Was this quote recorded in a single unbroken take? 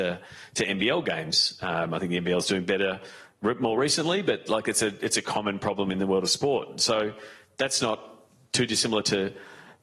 yes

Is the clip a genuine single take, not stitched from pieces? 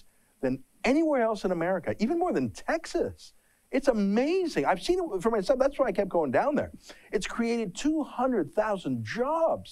yes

